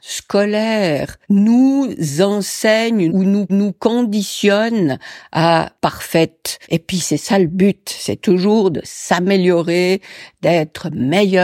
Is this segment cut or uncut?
cut